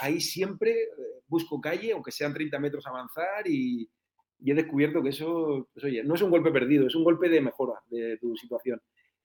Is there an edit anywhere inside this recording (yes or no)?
no